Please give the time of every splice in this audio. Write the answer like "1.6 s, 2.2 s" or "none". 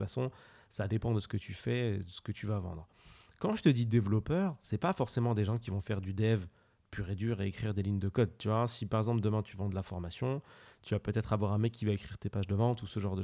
none